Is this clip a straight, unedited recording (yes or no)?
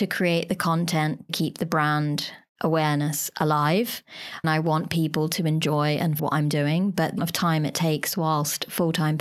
no